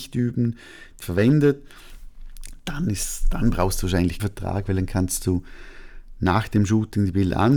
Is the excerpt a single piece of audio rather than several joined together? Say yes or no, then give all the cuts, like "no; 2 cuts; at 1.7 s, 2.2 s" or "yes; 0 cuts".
no; 2 cuts; at 1.0 s, 4.2 s